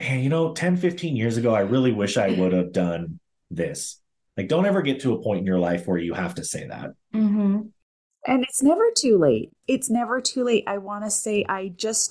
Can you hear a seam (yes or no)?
no